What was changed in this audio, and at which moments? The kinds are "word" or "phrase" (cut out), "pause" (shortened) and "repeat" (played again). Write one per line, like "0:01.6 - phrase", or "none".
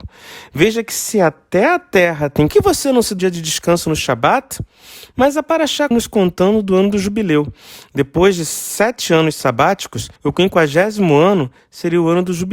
0:02.5 - phrase
0:03.2 - word
0:05.9 - word
0:10.2 - pause